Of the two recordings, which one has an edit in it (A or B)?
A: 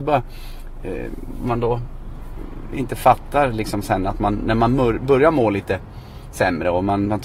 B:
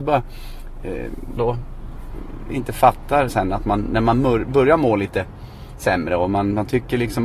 B